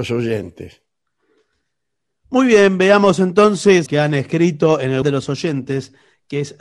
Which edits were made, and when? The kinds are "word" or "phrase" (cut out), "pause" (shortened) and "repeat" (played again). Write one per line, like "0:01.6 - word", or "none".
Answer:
0:03.9 - phrase
0:05.0 - word